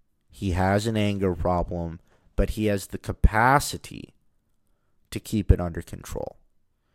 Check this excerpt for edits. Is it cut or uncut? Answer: uncut